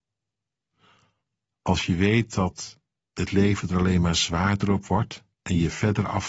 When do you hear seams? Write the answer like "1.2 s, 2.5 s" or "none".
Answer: 3.0 s, 5.3 s